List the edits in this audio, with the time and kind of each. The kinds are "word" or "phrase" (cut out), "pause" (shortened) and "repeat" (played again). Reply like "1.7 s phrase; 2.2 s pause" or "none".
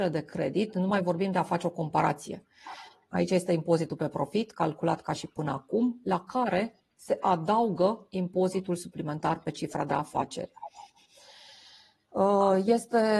none